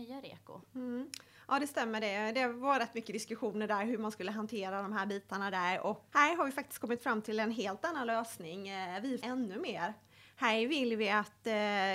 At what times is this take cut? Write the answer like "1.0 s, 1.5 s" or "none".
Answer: 6.1 s, 9.2 s